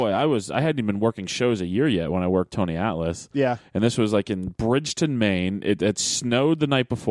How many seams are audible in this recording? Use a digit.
0